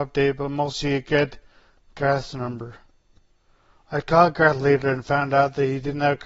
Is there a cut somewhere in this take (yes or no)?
no